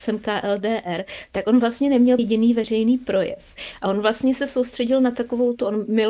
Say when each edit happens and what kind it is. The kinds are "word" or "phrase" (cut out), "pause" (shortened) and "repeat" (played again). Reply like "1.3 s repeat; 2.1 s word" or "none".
2.2 s word